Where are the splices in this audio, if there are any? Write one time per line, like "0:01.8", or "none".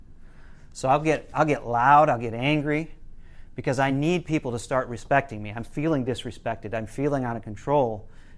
none

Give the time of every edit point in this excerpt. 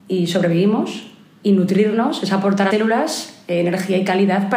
0:02.7

